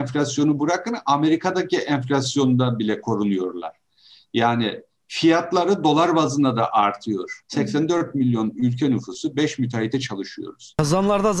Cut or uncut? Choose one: uncut